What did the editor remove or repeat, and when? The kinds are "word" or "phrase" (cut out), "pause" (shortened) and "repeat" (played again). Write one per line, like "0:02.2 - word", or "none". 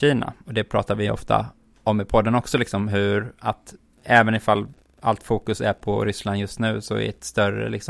none